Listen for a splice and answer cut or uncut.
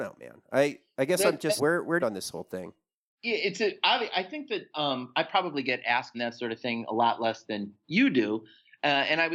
cut